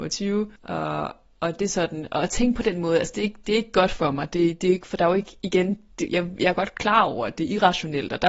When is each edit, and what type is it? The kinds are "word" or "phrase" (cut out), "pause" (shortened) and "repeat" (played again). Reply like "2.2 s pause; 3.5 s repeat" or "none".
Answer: none